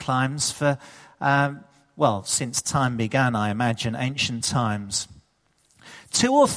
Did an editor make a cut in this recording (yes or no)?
no